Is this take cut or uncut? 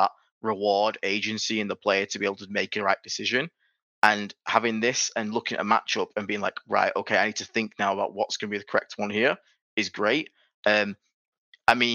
uncut